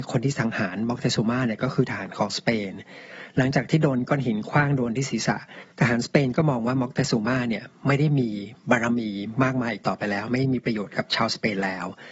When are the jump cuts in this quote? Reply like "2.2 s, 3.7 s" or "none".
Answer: 5.7 s